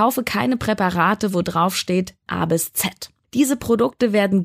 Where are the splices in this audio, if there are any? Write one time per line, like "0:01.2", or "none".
0:02.3
0:03.2